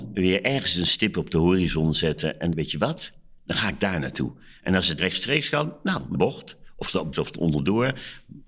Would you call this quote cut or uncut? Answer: cut